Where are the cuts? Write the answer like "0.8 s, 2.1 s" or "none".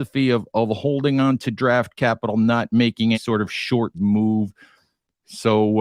3.1 s, 3.9 s